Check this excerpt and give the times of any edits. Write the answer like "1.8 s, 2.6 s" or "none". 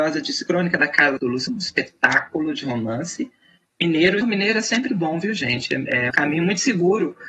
1.2 s, 1.5 s, 4.2 s, 4.9 s, 6.1 s